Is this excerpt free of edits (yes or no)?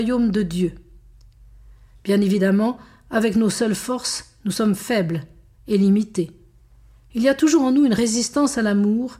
yes